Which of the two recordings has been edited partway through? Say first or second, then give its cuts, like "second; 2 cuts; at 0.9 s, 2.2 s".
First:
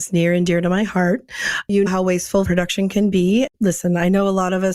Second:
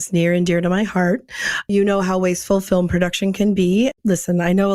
first; 2 cuts; at 1.9 s, 2.4 s